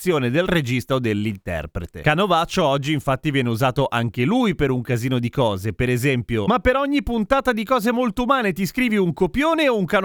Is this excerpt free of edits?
yes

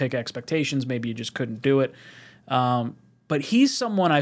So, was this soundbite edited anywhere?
no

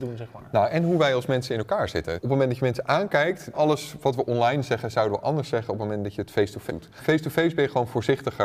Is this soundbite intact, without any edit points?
no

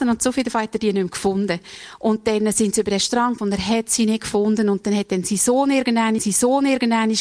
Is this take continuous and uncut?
no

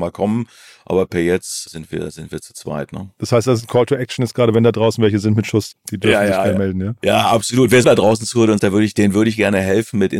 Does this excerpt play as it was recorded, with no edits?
no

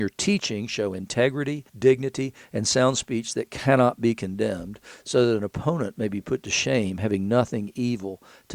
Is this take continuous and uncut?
no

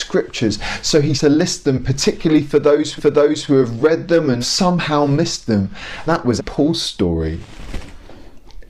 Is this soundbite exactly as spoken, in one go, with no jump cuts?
no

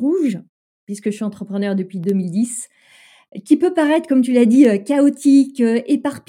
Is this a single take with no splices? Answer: yes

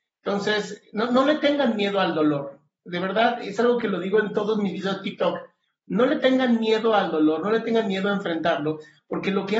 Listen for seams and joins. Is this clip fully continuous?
yes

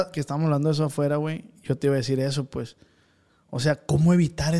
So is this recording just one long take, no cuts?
yes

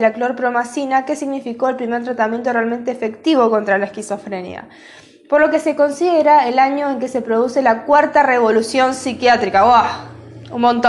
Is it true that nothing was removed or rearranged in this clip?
yes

